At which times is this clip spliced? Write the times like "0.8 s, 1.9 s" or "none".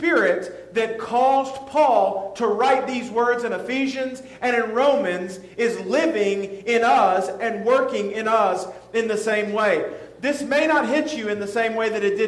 none